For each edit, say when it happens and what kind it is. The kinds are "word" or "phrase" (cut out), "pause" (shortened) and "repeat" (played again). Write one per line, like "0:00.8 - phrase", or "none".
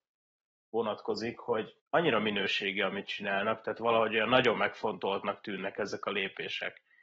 0:01.8 - pause